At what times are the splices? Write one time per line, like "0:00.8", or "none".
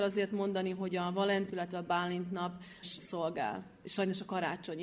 0:01.5
0:02.8